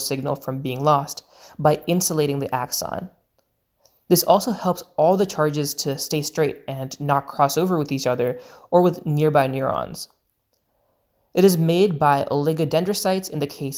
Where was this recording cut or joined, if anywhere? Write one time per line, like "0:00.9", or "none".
none